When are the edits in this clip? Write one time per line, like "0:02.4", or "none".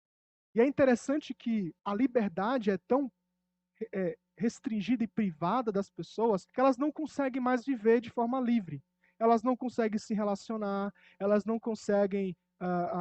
0:01.8
0:06.5